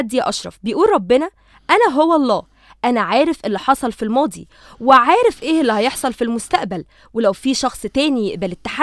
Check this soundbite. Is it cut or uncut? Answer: uncut